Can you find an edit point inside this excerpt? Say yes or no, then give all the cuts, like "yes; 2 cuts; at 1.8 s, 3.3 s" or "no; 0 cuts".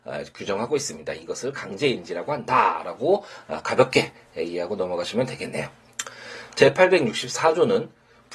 no; 0 cuts